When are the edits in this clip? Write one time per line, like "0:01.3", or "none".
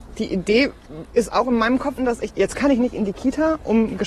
0:02.0
0:02.3